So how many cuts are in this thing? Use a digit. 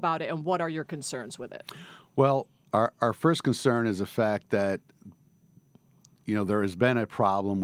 0